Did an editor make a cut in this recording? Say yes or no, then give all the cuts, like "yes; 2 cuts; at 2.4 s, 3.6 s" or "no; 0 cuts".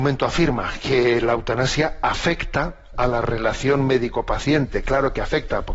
no; 0 cuts